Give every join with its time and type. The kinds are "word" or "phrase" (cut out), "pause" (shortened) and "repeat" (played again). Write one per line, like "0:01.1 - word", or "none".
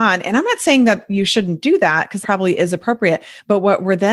0:02.2 - word

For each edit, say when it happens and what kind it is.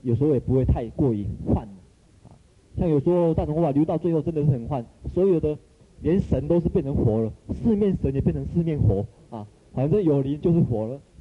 none

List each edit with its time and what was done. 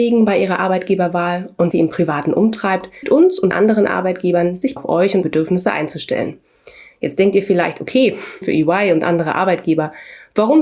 0:01.7 - word
0:03.0 - word
0:03.5 - word
0:04.8 - word
0:05.2 - word
0:08.4 - word

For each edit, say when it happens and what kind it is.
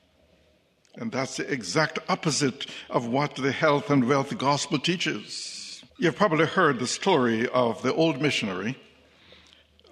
0:05.9 - pause

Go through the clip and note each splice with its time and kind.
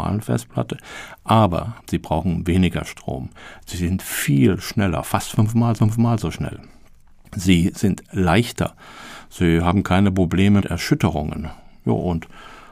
0:01.8 - pause
0:05.8 - repeat
0:10.6 - word

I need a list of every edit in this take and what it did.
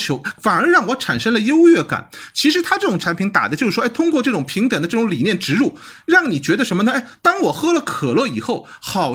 none

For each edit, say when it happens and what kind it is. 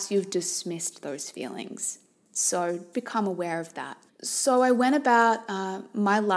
0:02.9 - word
0:04.1 - pause

